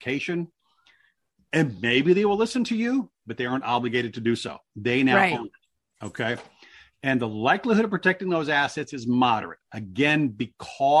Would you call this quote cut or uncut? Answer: uncut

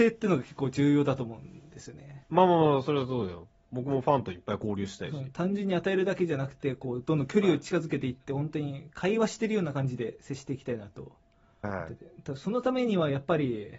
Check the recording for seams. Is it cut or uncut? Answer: cut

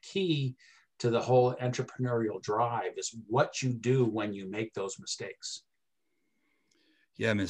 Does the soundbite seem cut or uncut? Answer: uncut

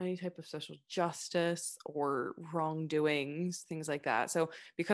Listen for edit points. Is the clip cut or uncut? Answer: uncut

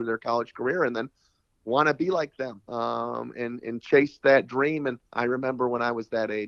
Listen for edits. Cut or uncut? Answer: cut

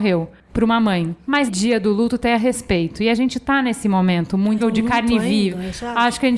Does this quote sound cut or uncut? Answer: cut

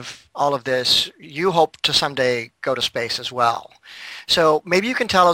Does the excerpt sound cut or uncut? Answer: uncut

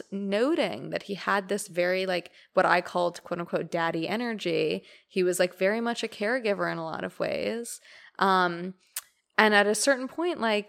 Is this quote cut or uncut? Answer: uncut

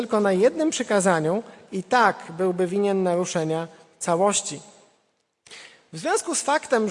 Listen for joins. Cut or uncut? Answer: uncut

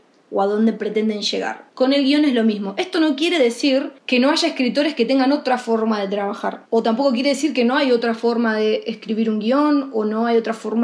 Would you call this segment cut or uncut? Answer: uncut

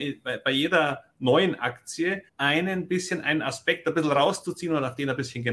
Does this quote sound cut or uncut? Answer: cut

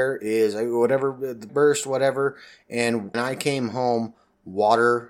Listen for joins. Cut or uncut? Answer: cut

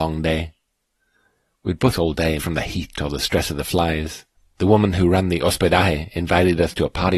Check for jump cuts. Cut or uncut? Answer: cut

